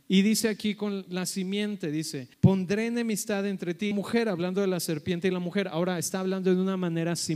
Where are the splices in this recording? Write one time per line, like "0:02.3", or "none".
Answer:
0:02.3
0:03.9